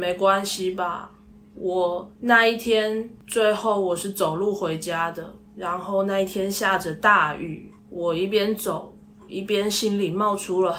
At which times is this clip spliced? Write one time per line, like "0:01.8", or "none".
0:02.2
0:05.5
0:07.8

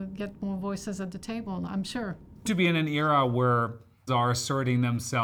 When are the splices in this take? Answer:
0:01.7
0:02.5
0:04.1

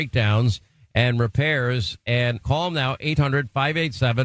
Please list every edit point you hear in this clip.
0:02.4

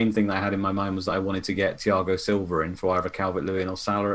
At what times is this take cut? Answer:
none

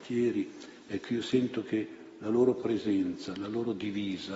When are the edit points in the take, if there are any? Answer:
none

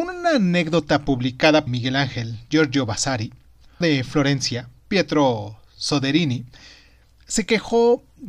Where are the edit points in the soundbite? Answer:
0:01.7
0:03.8
0:04.8

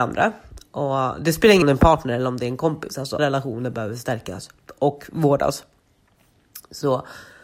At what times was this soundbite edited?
0:01.6
0:03.2

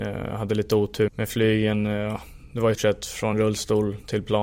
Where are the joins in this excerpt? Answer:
0:01.1
0:02.7
0:03.3

